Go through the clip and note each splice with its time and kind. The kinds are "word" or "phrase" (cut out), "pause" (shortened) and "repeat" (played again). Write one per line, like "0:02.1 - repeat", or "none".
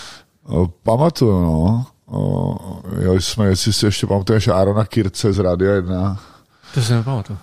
none